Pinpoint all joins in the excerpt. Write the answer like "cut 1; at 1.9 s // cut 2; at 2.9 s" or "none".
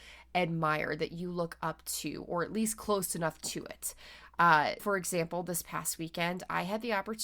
cut 1; at 4.8 s